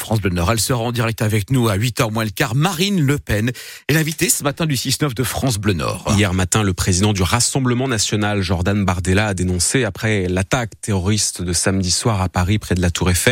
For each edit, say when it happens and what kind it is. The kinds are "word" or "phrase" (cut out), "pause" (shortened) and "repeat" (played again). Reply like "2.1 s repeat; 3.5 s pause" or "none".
none